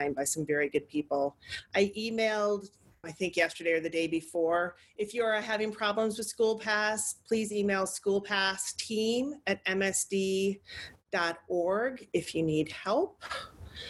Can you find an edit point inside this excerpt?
yes; 1 cut; at 3.0 s

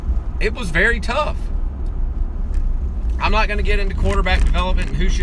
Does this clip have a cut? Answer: no; 0 cuts

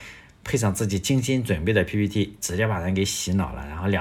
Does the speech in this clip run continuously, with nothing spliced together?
yes; 0 cuts

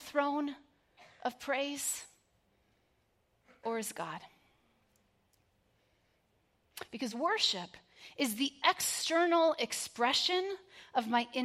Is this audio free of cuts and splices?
yes; 0 cuts

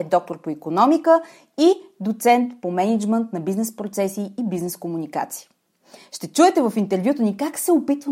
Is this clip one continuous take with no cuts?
yes; 0 cuts

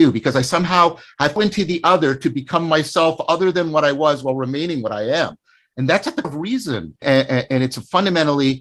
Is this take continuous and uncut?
no; 4 cuts; at 1.4 s, 6.2 s, 7.0 s, 7.5 s

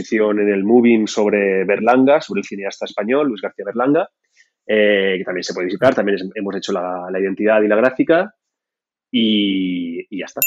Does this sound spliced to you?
no; 0 cuts

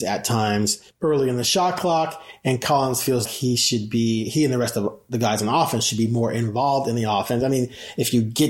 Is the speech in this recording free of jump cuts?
no; 1 cut; at 3.3 s

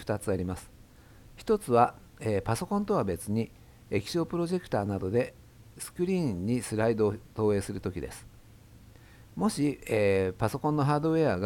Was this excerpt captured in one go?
yes; 0 cuts

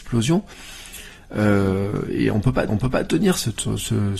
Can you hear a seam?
yes; 1 cut; at 2.7 s

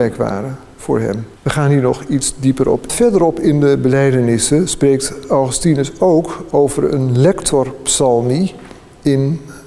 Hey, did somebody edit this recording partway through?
yes; 2 cuts; at 1.4 s, 2.9 s

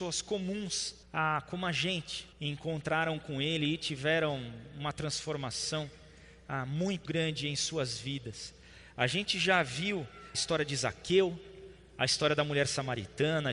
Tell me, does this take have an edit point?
yes; 4 cuts; at 1.0 s, 2.3 s, 7.0 s, 10.3 s

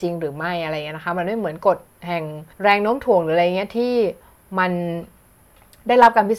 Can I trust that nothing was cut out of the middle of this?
no; 1 cut; at 2.5 s

